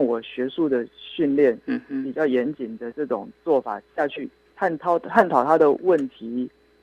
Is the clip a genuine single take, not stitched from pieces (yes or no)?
yes